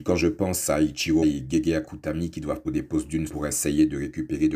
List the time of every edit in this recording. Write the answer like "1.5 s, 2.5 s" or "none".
1.2 s, 2.6 s, 3.3 s